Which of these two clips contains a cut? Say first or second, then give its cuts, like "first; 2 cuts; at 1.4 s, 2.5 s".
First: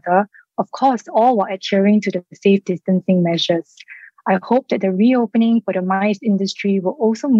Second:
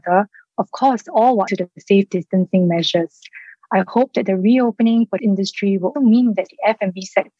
second; 3 cuts; at 1.5 s, 5.2 s, 5.9 s